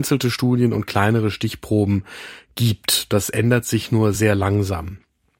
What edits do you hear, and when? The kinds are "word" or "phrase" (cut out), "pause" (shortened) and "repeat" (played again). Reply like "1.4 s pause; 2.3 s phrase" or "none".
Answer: none